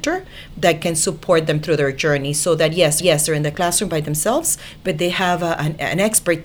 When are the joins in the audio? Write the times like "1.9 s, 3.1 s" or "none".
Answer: 3.0 s